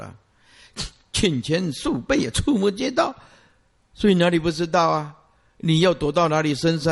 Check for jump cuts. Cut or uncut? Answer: uncut